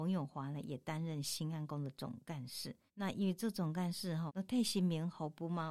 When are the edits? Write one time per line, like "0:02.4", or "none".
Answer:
0:02.9
0:04.3